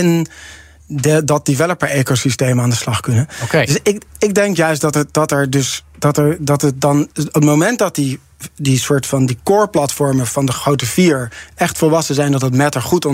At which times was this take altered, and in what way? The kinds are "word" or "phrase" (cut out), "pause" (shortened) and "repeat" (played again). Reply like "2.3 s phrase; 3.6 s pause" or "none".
4.1 s pause; 7.1 s pause